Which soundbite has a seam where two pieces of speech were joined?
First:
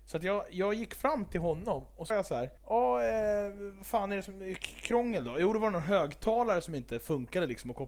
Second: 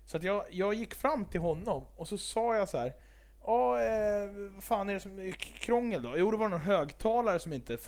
first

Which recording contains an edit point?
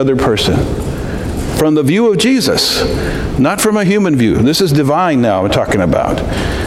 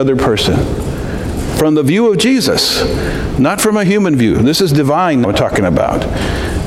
second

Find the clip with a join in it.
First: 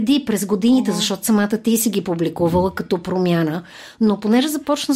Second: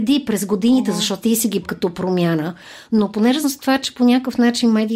second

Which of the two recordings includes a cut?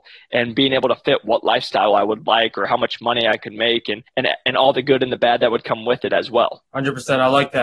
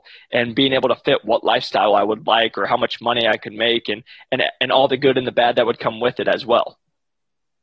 first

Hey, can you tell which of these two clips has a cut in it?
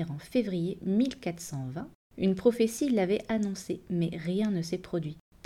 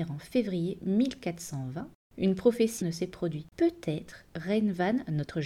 second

